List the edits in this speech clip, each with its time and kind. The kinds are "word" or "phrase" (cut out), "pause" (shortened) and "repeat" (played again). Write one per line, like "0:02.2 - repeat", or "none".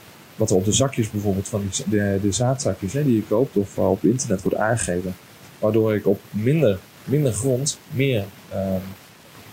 0:07.8 - pause